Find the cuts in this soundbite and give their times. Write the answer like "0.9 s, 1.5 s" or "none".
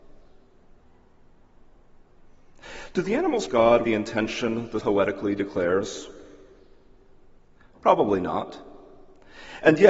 3.5 s, 3.8 s, 4.8 s